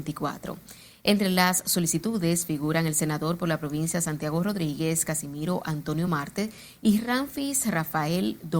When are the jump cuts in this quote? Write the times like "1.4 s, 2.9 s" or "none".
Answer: none